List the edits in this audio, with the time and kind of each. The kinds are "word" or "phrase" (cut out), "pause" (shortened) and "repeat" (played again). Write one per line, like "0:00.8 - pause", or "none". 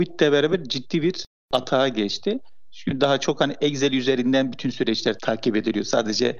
none